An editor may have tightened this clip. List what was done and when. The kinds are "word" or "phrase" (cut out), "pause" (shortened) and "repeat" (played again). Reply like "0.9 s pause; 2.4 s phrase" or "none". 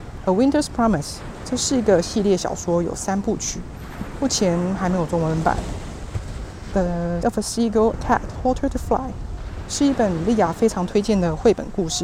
7.2 s word; 7.9 s word; 8.3 s word